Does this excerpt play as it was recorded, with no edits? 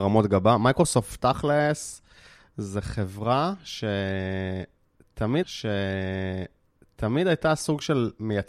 no; 1 cut; at 5.4 s

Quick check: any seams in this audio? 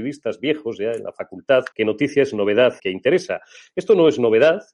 yes; 2 cuts; at 1.7 s, 2.8 s

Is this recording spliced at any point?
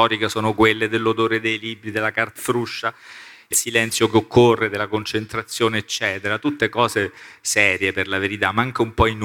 yes; 2 cuts; at 2.4 s, 3.5 s

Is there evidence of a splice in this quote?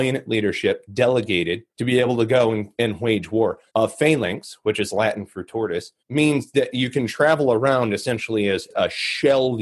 yes; 3 cuts; at 1.7 s, 3.7 s, 6.0 s

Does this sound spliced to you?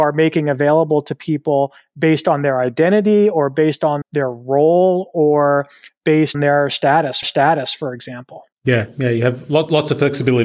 yes; 4 cuts; at 4.0 s, 6.3 s, 7.2 s, 8.5 s

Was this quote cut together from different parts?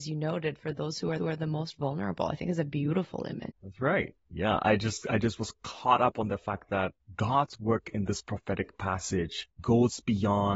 yes; 4 cuts; at 1.2 s, 3.5 s, 7.0 s, 9.5 s

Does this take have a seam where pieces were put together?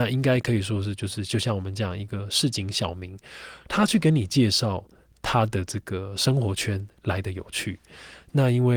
no; 0 cuts

